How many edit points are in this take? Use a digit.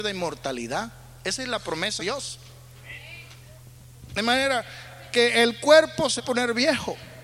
2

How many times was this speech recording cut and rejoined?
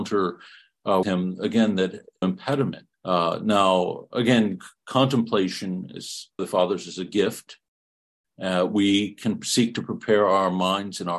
4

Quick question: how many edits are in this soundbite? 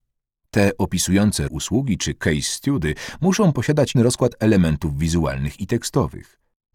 2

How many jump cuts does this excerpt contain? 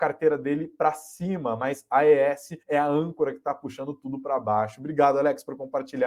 1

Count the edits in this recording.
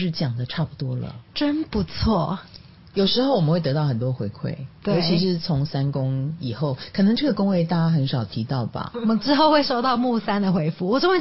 1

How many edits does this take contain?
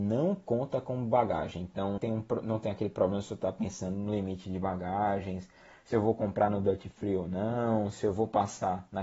1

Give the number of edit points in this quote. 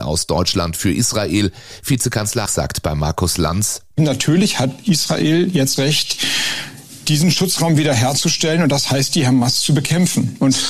2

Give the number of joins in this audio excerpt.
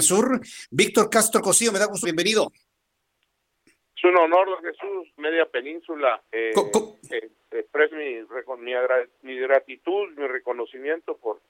4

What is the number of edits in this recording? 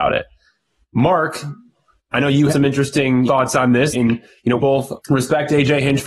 3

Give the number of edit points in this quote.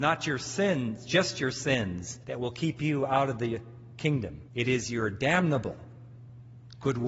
2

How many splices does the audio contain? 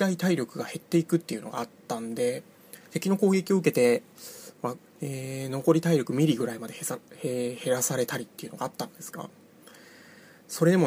1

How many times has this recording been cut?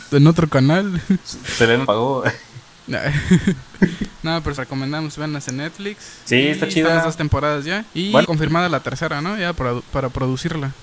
5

